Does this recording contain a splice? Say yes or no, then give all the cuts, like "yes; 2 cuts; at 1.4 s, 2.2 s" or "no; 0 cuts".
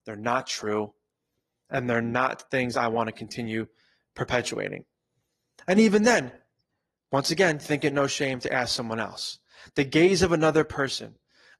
no; 0 cuts